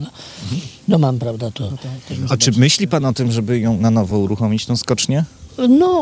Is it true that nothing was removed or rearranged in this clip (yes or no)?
yes